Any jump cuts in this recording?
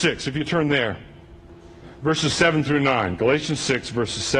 no; 0 cuts

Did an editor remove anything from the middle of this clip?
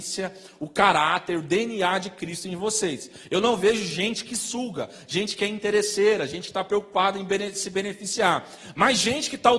no; 0 cuts

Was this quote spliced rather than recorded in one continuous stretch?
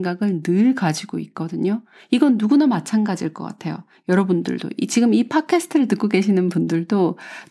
no; 0 cuts

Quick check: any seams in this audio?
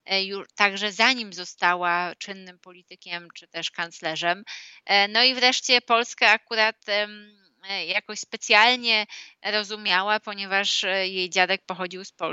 no; 0 cuts

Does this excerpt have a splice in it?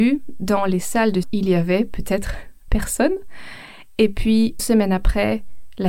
yes; 3 cuts; at 1.2 s, 2.7 s, 4.6 s

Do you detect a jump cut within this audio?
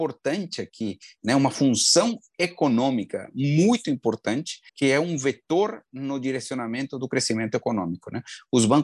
yes; 1 cut; at 4.7 s

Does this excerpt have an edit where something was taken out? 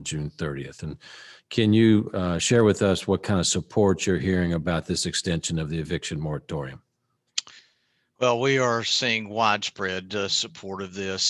no; 0 cuts

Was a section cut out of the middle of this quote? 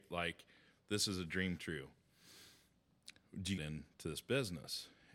yes; 2 cuts; at 1.6 s, 3.6 s

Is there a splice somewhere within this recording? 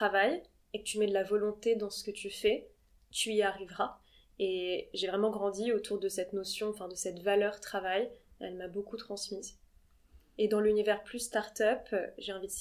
no; 0 cuts

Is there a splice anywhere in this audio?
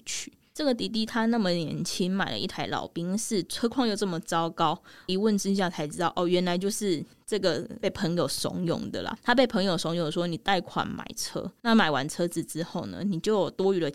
yes; 1 cut; at 5.1 s

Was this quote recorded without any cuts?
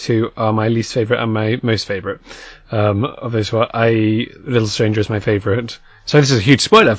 yes; 0 cuts

